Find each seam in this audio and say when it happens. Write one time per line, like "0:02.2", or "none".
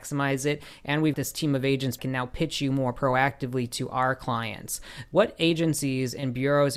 0:01.1
0:02.0

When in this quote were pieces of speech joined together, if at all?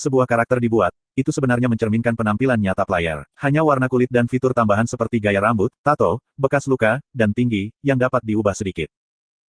0:03.3
0:05.7

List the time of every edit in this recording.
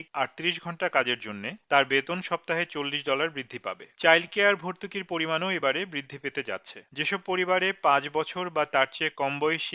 none

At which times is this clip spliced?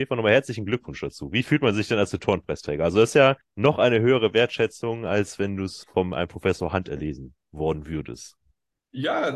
0:03.4
0:05.8

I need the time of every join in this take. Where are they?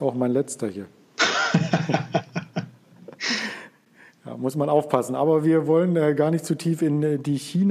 none

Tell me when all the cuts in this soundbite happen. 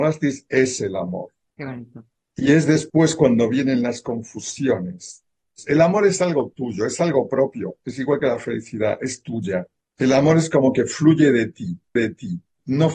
0:12.0

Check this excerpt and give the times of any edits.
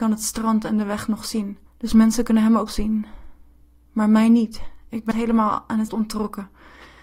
0:01.7
0:02.7
0:05.1
0:05.9

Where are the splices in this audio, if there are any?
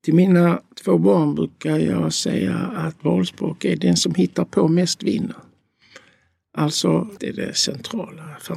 0:03.0
0:07.2

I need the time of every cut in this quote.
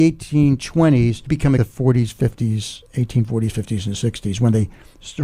0:01.3
0:01.6
0:02.9

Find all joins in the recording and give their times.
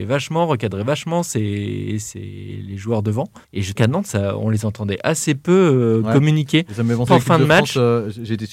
0:03.4
0:03.8
0:07.1

